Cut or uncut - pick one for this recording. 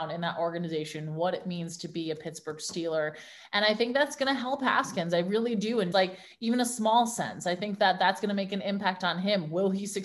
cut